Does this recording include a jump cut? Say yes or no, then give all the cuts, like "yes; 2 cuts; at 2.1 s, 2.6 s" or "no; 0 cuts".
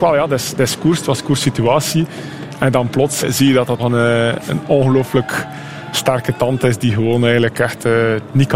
yes; 2 cuts; at 3.2 s, 3.8 s